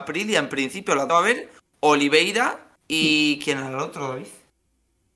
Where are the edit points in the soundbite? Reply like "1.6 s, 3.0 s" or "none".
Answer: 1.1 s, 2.8 s